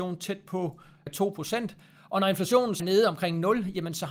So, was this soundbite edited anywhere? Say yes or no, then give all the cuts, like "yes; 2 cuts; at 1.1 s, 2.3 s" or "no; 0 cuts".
yes; 2 cuts; at 1.1 s, 2.8 s